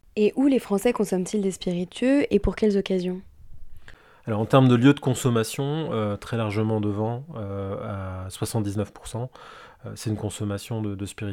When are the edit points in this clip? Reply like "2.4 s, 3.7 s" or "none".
none